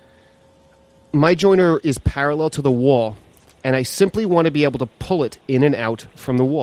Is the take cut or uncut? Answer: uncut